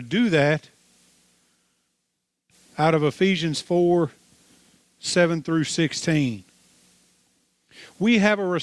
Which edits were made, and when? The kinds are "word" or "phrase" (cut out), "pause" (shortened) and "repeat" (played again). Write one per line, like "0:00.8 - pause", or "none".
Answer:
none